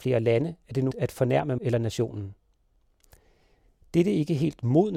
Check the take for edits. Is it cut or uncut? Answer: cut